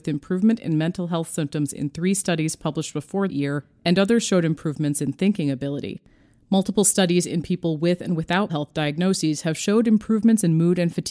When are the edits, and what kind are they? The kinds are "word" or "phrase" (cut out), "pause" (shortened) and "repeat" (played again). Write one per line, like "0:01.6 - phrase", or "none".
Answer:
0:03.3 - word
0:08.5 - word